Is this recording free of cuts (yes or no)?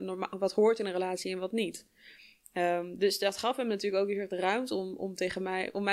yes